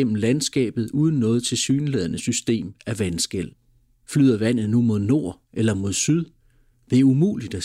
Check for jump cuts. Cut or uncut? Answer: uncut